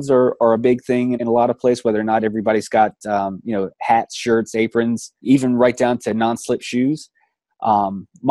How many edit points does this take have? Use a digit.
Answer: 3